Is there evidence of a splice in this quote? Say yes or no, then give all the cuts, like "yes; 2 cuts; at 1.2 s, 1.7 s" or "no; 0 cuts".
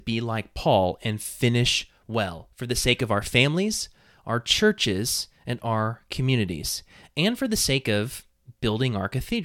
no; 0 cuts